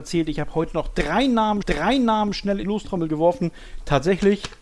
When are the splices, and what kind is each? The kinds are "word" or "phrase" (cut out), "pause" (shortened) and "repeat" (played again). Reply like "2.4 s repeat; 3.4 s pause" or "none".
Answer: 1.6 s repeat; 2.6 s word